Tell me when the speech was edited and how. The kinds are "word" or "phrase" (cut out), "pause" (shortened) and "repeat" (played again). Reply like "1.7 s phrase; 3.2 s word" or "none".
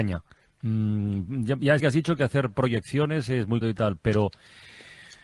1.8 s phrase; 3.6 s word